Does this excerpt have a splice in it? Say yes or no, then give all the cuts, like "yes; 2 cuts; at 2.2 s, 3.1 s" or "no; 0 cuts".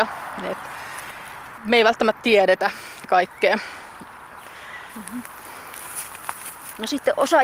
yes; 2 cuts; at 1.6 s, 2.2 s